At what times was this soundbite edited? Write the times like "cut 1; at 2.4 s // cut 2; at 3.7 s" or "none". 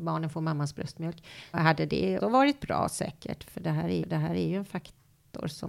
cut 1; at 1.5 s // cut 2; at 2.2 s // cut 3; at 4.0 s